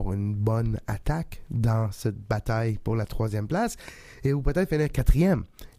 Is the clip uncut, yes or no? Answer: yes